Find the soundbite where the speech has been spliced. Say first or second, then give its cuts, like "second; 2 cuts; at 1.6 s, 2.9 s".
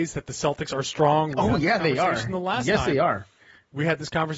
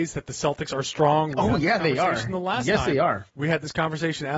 second; 1 cut; at 3.3 s